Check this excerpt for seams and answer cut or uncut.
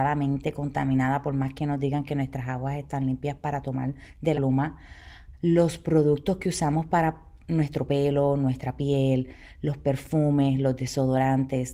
cut